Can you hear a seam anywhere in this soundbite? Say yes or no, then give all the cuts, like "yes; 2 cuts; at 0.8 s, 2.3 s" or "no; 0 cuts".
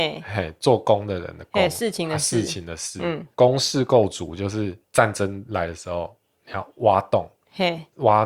no; 0 cuts